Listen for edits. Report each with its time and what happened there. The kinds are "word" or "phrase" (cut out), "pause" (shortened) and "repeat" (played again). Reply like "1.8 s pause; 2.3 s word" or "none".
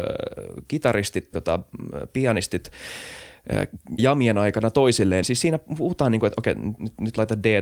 1.3 s word; 4.0 s word; 5.2 s phrase